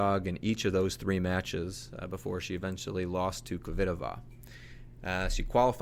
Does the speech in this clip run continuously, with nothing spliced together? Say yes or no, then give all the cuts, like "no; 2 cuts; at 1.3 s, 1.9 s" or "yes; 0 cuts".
yes; 0 cuts